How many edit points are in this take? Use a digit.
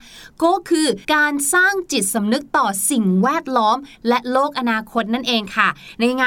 1